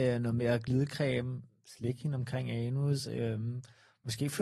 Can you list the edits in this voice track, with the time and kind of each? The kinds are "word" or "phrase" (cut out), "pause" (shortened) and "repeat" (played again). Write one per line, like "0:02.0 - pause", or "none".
none